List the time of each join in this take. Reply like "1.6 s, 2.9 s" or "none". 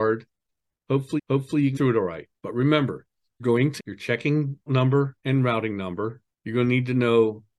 1.2 s, 1.7 s, 2.4 s, 3.4 s, 3.8 s, 4.7 s, 5.2 s, 6.3 s